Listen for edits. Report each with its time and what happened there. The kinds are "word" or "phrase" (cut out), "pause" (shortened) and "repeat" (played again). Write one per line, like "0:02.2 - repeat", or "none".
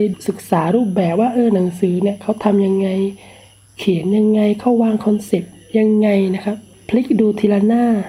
none

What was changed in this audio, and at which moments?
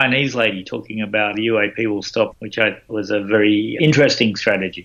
0:01.3 - word
0:02.3 - word
0:02.9 - word
0:03.8 - word

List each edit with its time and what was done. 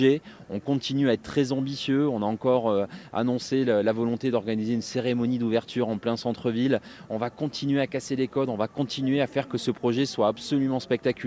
none

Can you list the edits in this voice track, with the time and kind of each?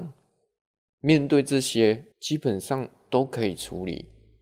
0:02.1 - pause

